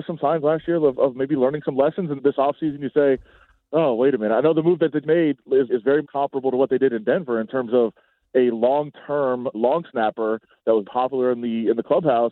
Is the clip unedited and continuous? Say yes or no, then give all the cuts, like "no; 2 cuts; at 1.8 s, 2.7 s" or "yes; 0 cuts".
no; 6 cuts; at 2.2 s, 5.0 s, 5.7 s, 6.0 s, 9.5 s, 10.8 s